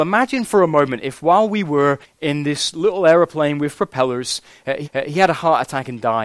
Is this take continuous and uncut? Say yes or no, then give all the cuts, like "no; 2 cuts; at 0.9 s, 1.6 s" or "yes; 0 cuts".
no; 2 cuts; at 2.0 s, 4.8 s